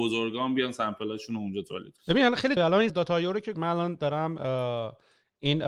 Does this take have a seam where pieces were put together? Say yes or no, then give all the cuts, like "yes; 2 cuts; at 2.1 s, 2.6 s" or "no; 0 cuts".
yes; 4 cuts; at 2.0 s, 2.6 s, 2.9 s, 3.5 s